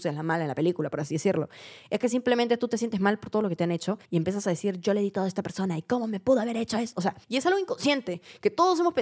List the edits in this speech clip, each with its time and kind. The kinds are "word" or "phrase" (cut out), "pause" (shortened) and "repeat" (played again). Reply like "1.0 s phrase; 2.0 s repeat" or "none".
4.0 s pause; 7.2 s pause